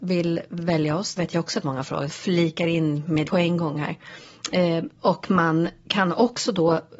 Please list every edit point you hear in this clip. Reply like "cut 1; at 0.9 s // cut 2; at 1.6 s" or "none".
cut 1; at 1.2 s // cut 2; at 1.6 s // cut 3; at 2.1 s // cut 4; at 3.2 s